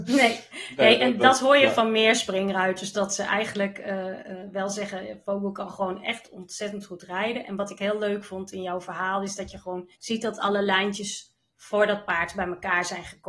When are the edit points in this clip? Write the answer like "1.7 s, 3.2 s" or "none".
10.0 s